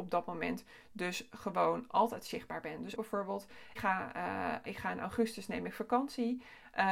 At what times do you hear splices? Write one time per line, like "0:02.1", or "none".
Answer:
0:03.0
0:03.8
0:04.7